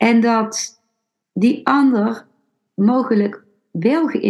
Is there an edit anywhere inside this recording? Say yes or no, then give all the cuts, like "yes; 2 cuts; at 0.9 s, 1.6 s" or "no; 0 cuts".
no; 0 cuts